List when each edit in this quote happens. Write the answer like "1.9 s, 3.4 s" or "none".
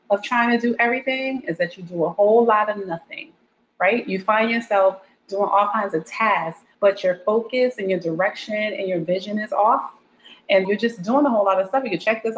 6.7 s, 10.6 s